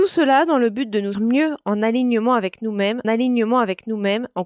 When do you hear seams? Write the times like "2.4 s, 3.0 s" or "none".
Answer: 1.1 s, 3.0 s